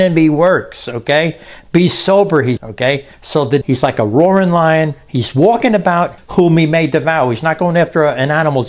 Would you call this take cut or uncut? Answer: cut